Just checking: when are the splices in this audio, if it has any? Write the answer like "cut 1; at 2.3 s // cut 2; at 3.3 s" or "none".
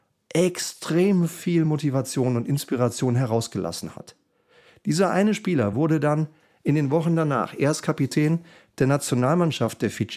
none